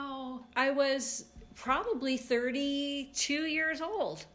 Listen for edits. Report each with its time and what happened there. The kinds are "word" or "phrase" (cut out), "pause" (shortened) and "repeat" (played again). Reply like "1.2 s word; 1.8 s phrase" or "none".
none